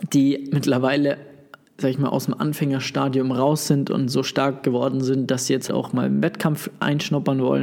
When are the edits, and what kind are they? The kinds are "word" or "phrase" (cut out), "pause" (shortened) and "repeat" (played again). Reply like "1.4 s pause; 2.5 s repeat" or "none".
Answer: 5.7 s word